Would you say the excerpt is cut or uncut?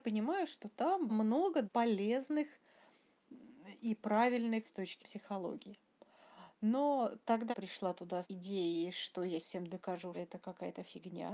cut